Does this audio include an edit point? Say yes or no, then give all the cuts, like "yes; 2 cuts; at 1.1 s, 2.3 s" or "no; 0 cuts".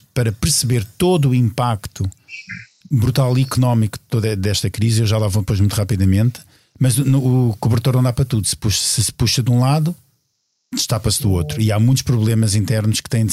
no; 0 cuts